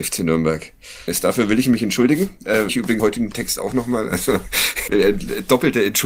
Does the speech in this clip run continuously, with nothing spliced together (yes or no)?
no